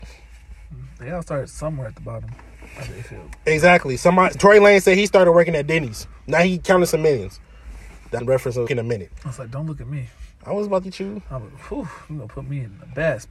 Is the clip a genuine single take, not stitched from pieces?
no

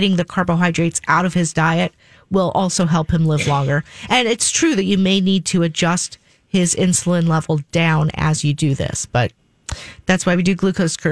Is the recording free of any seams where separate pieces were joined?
yes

